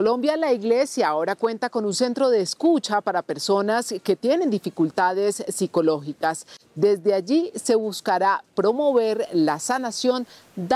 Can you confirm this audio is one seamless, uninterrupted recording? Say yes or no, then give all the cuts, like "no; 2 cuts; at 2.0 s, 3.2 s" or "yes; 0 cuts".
yes; 0 cuts